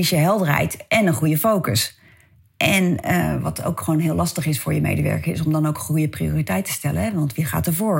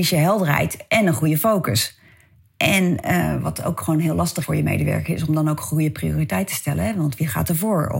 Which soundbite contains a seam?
second; 1 cut; at 4.4 s

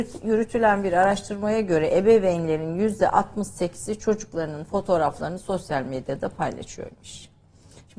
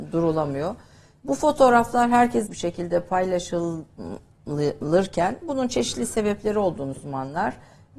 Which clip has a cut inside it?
second; 2 cuts; at 2.5 s, 7.0 s

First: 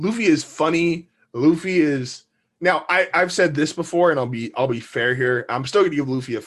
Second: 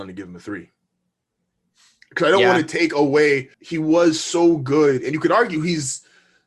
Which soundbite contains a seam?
second; 1 cut; at 3.5 s

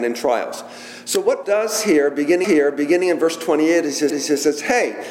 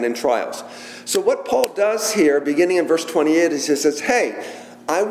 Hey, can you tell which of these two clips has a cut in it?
first; 3 cuts; at 1.4 s, 2.4 s, 4.1 s

